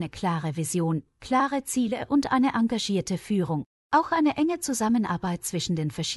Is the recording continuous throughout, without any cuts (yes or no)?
no